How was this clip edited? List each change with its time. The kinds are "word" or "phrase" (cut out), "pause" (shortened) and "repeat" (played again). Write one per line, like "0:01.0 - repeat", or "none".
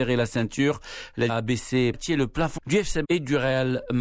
0:01.3 - word
0:01.9 - phrase
0:02.6 - word
0:03.0 - word